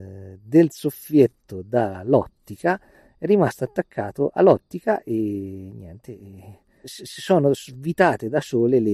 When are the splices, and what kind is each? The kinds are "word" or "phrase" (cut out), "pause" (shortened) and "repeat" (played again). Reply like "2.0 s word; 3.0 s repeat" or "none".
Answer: 6.8 s word